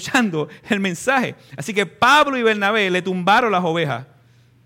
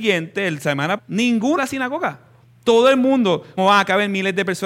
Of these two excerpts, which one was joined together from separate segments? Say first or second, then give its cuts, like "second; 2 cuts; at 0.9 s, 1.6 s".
second; 4 cuts; at 1.0 s, 1.6 s, 2.4 s, 3.6 s